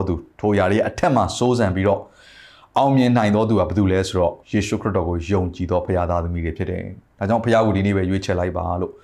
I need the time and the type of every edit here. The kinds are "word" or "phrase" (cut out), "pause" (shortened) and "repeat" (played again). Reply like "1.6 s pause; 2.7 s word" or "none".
4.4 s pause